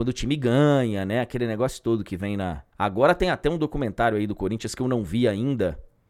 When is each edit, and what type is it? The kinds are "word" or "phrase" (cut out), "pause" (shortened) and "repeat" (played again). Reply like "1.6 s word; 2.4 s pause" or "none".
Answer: 2.7 s pause